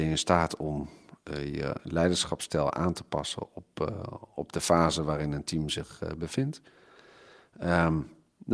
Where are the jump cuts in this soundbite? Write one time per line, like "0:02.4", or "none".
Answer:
none